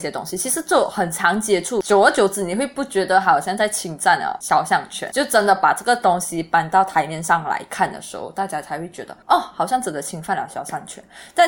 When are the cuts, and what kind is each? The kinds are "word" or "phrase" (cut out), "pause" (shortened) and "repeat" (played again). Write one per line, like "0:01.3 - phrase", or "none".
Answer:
0:09.2 - pause